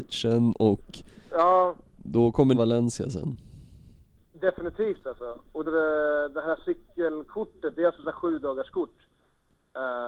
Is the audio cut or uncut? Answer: cut